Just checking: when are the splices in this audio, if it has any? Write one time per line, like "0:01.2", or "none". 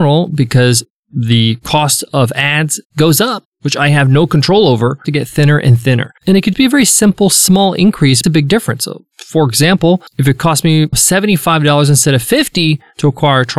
0:05.0
0:06.2
0:06.5
0:08.2
0:10.1
0:10.9